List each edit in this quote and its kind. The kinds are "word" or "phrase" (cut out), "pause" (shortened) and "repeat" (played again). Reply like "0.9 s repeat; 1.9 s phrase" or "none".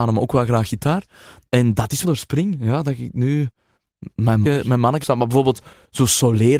2.0 s word; 4.4 s word; 5.0 s word

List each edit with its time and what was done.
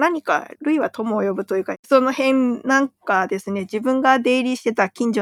none

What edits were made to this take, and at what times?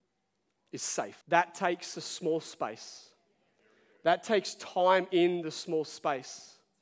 1.2 s pause

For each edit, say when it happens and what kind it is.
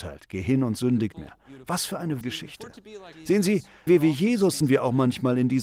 1.1 s word; 2.2 s word; 3.1 s pause; 3.9 s word; 4.6 s phrase

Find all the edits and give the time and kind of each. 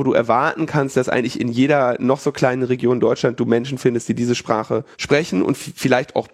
4.9 s pause

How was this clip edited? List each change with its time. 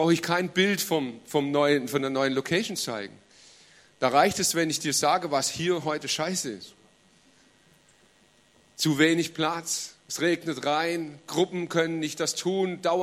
none

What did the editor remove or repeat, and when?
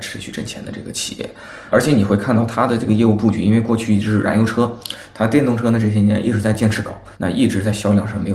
1.7 s word; 7.1 s pause

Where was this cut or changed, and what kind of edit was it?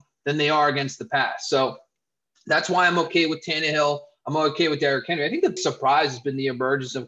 5.6 s word

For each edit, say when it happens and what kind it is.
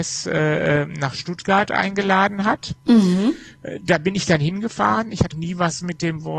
5.3 s word

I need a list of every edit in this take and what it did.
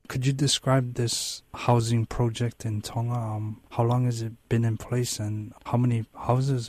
3.7 s pause; 5.7 s word

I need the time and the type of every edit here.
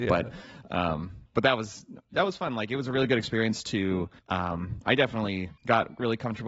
1.3 s pause; 4.2 s pause; 5.6 s pause

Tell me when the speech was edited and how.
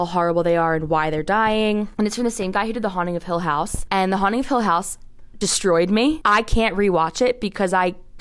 none

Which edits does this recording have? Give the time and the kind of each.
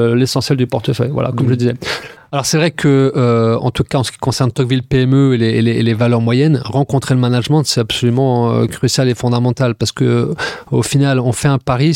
none

